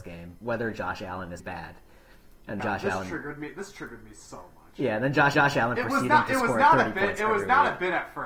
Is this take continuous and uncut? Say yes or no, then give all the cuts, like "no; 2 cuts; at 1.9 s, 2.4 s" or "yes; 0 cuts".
no; 3 cuts; at 1.4 s, 2.6 s, 5.3 s